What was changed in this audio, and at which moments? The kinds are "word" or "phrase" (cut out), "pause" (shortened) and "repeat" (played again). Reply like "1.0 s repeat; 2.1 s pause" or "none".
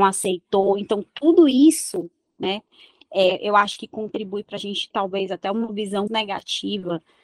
4.9 s word; 6.1 s word

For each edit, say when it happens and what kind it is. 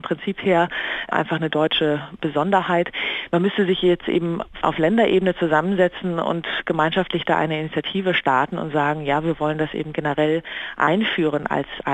4.6 s word

